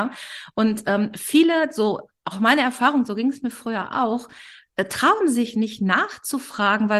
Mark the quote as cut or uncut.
uncut